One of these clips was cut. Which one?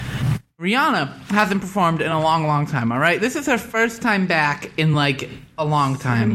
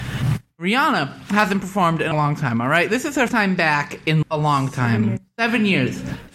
second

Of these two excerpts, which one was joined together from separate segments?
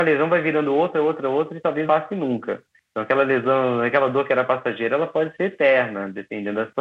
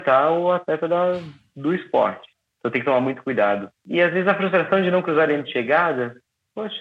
first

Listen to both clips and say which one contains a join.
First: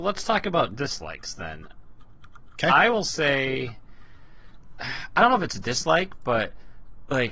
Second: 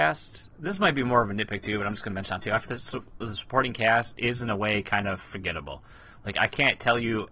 second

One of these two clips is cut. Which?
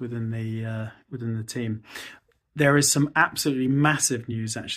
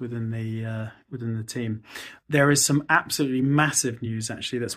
second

